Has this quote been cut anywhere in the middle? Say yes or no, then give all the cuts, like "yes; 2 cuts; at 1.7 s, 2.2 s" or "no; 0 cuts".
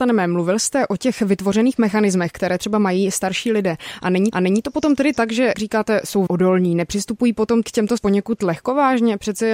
yes; 5 cuts; at 4.3 s, 5.5 s, 6.3 s, 7.6 s, 8.0 s